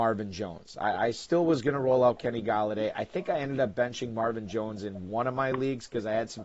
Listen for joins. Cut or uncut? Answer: uncut